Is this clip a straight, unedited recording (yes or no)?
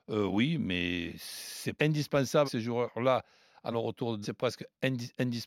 no